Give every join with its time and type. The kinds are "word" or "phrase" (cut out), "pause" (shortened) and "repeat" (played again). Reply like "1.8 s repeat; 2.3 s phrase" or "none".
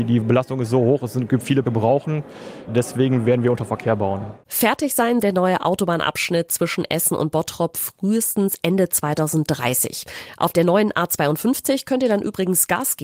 1.6 s phrase; 5.2 s word